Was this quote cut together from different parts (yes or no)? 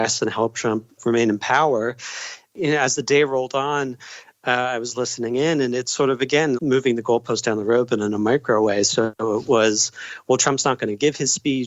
yes